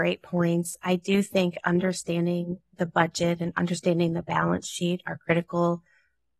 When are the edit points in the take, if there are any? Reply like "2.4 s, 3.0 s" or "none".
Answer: none